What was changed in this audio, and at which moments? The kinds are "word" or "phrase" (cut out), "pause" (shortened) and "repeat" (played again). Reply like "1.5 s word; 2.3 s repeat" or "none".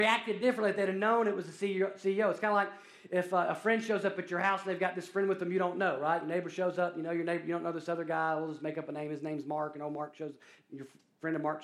none